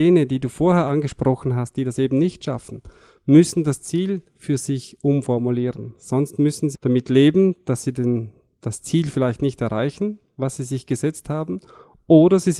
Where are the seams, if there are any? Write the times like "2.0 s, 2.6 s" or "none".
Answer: 6.7 s